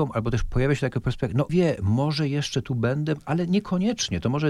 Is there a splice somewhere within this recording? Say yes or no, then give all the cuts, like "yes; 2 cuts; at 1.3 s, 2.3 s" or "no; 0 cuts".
yes; 1 cut; at 1.5 s